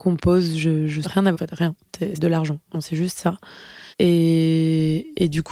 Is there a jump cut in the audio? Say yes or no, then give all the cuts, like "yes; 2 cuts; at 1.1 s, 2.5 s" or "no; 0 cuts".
yes; 5 cuts; at 1.0 s, 1.3 s, 2.1 s, 2.7 s, 3.9 s